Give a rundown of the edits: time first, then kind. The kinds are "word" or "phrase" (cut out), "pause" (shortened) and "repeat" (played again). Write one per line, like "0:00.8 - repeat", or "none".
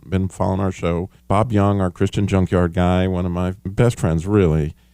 0:01.2 - pause
0:03.6 - pause